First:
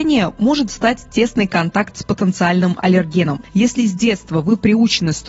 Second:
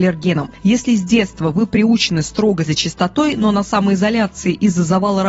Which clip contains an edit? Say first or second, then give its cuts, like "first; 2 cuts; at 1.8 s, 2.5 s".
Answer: second; 1 cut; at 2.7 s